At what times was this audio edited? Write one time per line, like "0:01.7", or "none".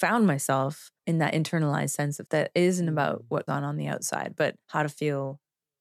0:01.0
0:02.2
0:03.5
0:04.6

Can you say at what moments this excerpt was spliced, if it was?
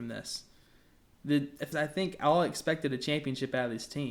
0:01.7

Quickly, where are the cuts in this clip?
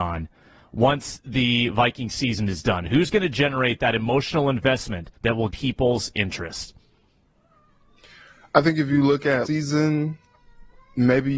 0:05.2
0:05.5
0:09.5

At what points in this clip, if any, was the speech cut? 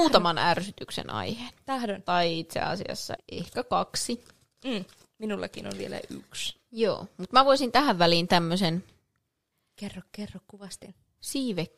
0:03.2

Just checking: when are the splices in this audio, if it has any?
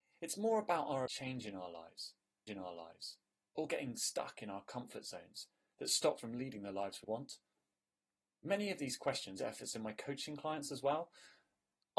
0:01.1
0:02.5
0:06.2
0:07.0
0:09.4

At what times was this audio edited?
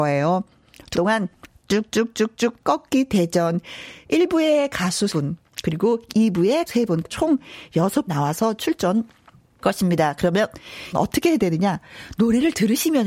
0:00.9
0:02.6
0:05.1
0:06.7
0:07.0
0:08.1
0:09.6
0:10.9

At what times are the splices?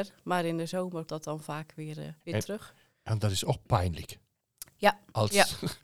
0:01.1
0:02.2

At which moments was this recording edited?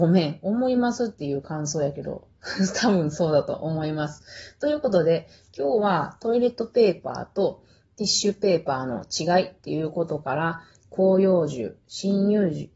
0:10.8

